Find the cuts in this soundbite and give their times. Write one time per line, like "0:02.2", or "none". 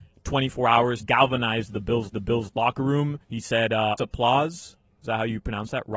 0:01.0
0:02.1
0:03.2
0:04.0